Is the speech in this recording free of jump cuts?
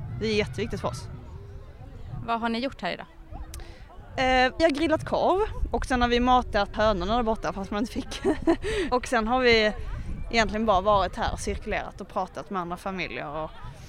no; 3 cuts; at 4.6 s, 6.7 s, 8.9 s

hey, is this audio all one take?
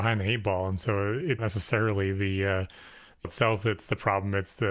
no; 2 cuts; at 1.4 s, 3.2 s

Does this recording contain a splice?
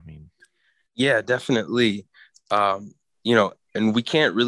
no; 0 cuts

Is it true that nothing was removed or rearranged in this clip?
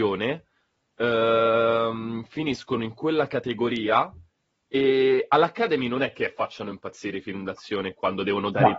yes; 0 cuts

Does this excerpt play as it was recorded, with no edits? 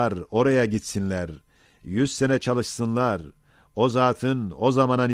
yes; 0 cuts

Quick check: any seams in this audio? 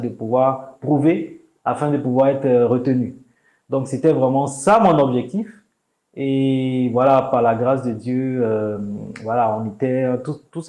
no; 0 cuts

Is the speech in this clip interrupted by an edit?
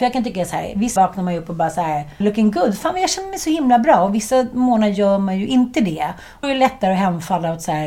yes; 3 cuts; at 1.0 s, 2.2 s, 6.4 s

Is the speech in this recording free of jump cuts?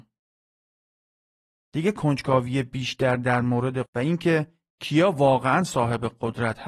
no; 1 cut; at 3.9 s

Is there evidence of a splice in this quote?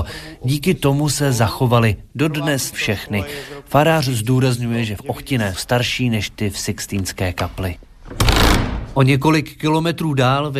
yes; 3 cuts; at 2.7 s, 5.0 s, 5.5 s

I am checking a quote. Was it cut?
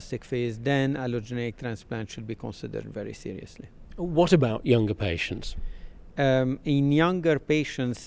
no; 0 cuts

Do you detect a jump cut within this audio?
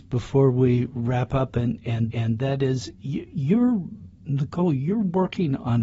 yes; 2 cuts; at 2.1 s, 4.1 s

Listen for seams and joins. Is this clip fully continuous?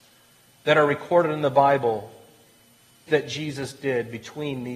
no; 1 cut; at 3.1 s

